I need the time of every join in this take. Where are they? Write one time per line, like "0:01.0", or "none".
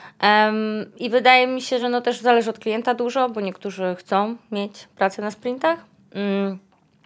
none